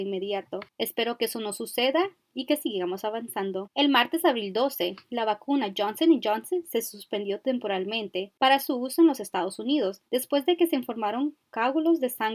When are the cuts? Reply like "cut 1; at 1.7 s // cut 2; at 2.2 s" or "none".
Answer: cut 1; at 10.1 s